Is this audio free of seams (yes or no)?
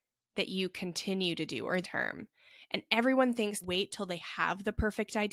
no